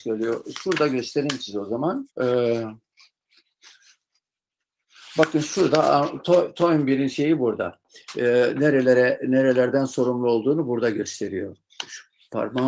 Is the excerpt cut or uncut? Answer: cut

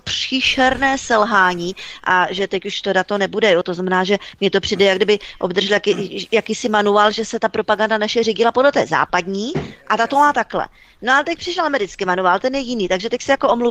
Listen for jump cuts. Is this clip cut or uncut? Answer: uncut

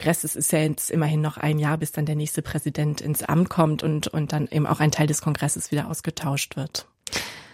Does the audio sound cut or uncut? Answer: uncut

